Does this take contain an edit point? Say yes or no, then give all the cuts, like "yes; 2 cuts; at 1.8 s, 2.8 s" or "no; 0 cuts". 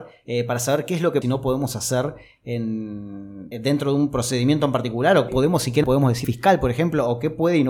yes; 5 cuts; at 1.2 s, 3.5 s, 5.3 s, 5.8 s, 6.2 s